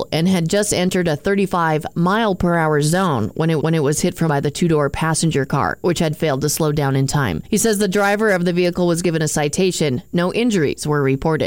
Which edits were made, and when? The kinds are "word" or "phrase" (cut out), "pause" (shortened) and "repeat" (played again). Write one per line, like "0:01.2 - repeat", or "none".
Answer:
0:03.6 - repeat
0:04.3 - word